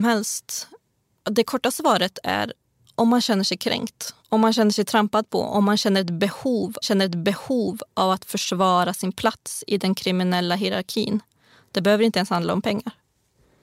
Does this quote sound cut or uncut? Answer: cut